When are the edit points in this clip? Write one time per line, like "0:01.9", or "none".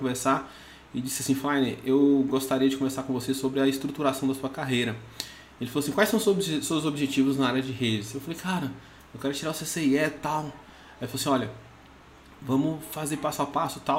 none